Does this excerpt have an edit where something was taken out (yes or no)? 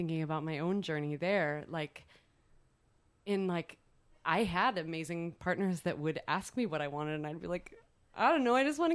no